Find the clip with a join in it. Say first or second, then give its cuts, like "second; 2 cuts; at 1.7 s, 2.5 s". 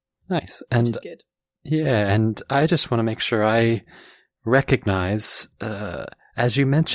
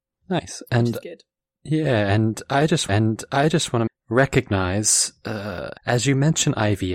second; 3 cuts; at 2.9 s, 3.9 s, 5.8 s